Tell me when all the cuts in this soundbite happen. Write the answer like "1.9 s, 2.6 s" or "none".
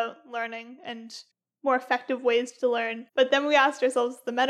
1.3 s, 3.1 s